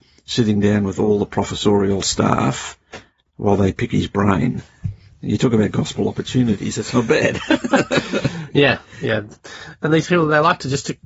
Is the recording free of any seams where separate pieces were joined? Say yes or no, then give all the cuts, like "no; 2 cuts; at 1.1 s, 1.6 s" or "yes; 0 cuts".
yes; 0 cuts